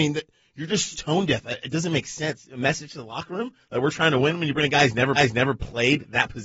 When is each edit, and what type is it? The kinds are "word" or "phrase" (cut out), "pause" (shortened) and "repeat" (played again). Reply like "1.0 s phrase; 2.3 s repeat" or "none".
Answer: 0.9 s word; 5.2 s repeat